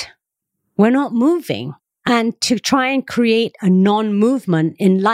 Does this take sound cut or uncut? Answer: uncut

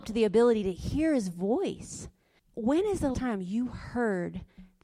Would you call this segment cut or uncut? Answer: cut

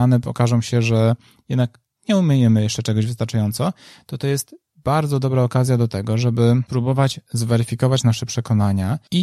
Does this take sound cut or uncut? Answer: uncut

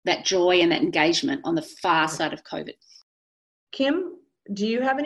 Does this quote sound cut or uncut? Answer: uncut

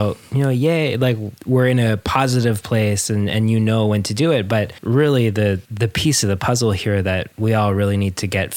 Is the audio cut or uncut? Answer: uncut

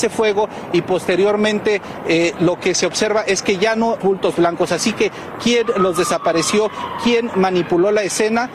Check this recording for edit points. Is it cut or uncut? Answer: cut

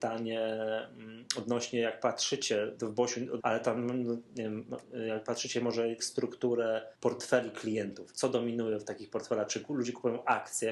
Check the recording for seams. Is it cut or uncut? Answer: cut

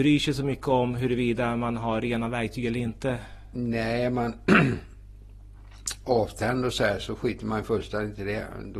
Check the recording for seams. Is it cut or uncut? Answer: uncut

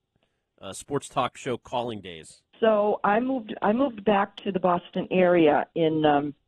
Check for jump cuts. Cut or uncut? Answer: cut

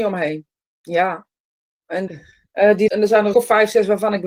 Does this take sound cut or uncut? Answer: cut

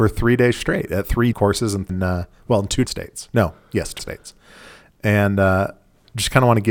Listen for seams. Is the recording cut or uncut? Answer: cut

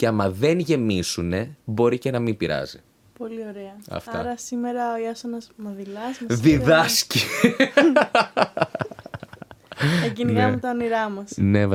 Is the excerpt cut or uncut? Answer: cut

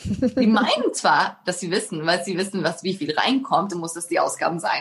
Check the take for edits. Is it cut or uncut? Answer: cut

